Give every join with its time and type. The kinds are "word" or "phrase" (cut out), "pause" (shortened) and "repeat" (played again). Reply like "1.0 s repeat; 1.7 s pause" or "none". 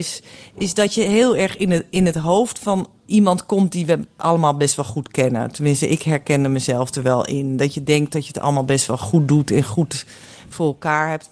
none